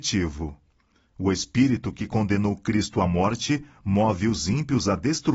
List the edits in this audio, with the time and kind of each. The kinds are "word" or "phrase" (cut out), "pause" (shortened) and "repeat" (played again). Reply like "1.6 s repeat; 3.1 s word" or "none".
none